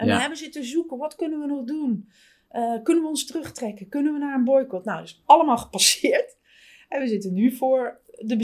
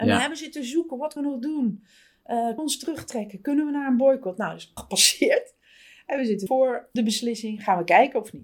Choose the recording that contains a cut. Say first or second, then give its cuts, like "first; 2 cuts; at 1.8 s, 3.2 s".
second; 5 cuts; at 1.2 s, 2.6 s, 4.8 s, 6.5 s, 7.0 s